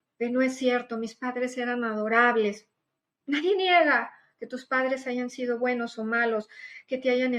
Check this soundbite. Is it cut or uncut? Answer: uncut